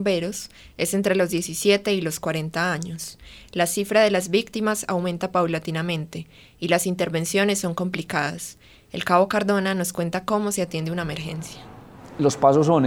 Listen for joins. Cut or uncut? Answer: uncut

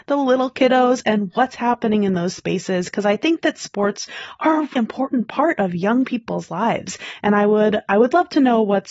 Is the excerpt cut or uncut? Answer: cut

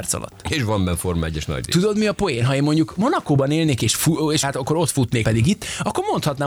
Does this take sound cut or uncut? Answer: cut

